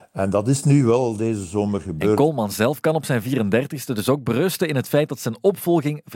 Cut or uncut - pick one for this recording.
uncut